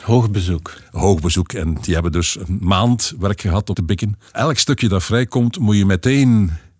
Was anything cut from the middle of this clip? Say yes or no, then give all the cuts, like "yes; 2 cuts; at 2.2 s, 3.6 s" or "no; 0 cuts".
yes; 2 cuts; at 3.7 s, 4.3 s